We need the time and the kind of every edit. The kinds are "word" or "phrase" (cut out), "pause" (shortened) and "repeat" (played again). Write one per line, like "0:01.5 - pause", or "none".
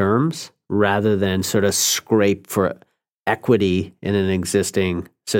none